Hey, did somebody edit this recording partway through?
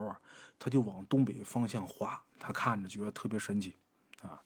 yes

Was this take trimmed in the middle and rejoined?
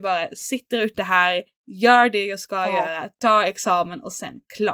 no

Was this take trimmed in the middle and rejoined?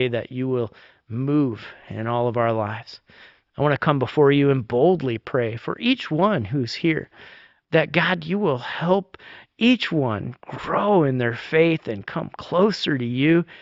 no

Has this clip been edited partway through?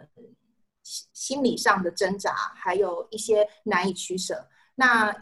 yes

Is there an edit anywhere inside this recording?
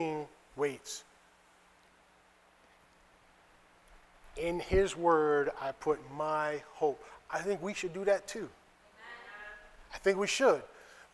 no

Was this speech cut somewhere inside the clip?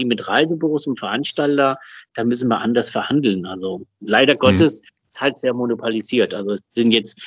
yes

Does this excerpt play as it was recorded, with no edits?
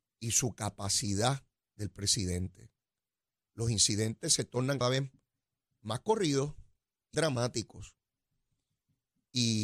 no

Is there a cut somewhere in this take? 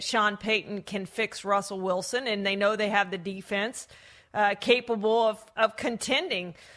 no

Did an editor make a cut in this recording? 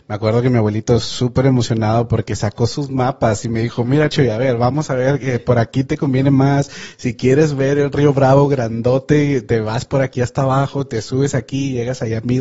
no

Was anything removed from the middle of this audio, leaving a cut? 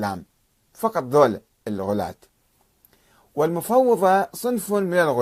no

